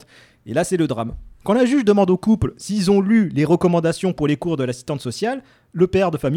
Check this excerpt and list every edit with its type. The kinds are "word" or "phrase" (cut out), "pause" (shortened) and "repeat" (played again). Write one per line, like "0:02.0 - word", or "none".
0:01.3 - pause